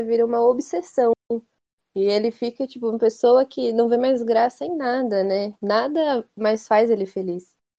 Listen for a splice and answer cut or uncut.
cut